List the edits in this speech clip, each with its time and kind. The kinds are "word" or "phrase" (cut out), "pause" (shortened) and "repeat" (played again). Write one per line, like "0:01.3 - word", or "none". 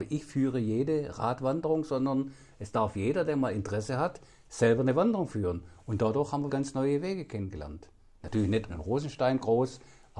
0:06.5 - word
0:08.7 - word